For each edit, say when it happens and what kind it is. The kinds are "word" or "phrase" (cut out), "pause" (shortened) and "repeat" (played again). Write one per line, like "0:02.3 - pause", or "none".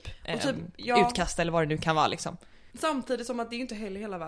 0:02.7 - pause